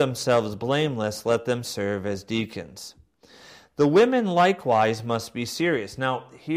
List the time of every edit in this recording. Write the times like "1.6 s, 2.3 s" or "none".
none